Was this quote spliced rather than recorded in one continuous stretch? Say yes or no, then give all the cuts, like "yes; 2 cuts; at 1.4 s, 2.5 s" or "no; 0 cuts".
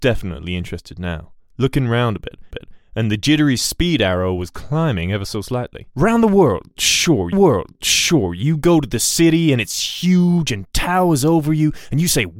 yes; 2 cuts; at 2.5 s, 7.3 s